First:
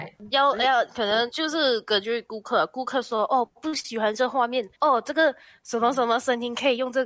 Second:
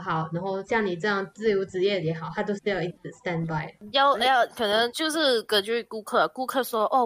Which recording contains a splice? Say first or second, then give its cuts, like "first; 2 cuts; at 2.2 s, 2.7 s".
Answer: first; 2 cuts; at 3.5 s, 4.7 s